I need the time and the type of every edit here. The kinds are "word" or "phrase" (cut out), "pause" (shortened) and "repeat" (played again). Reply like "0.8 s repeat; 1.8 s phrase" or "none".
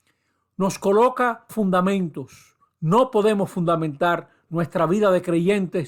1.5 s phrase; 2.7 s pause